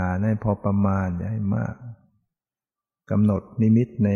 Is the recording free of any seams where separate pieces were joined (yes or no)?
yes